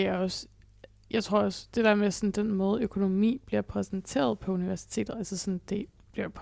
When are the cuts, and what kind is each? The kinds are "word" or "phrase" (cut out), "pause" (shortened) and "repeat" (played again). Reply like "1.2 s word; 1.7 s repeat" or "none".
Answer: none